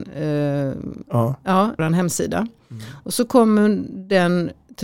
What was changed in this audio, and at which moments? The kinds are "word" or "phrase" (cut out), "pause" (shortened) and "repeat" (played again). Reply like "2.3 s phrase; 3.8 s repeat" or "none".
1.0 s word; 1.8 s phrase